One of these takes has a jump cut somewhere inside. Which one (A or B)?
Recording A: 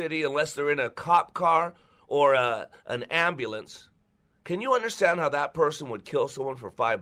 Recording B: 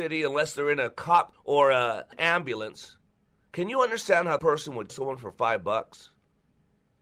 B